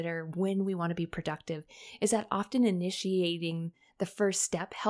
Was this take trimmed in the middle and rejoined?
no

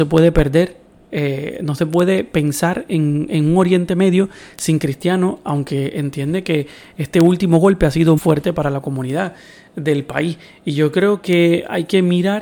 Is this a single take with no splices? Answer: no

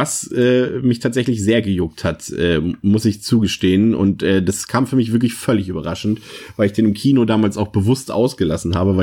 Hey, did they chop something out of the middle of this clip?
no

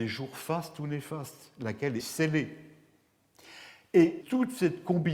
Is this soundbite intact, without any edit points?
no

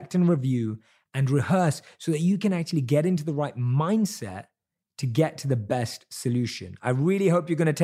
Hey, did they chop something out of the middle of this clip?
no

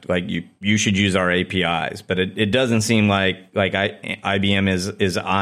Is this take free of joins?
yes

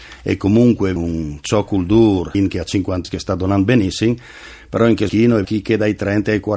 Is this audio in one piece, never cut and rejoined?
no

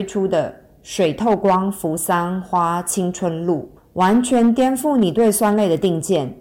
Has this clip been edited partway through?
yes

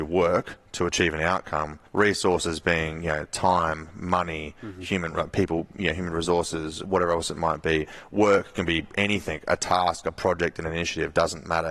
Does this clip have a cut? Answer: yes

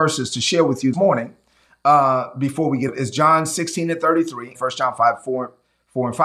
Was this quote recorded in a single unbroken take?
no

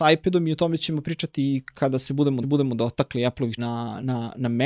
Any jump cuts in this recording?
yes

